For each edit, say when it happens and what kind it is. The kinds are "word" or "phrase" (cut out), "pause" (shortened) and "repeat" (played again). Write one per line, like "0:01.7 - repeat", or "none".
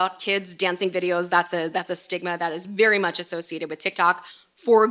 none